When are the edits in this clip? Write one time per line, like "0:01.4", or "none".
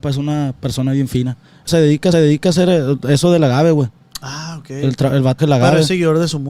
0:01.7
0:02.1
0:05.4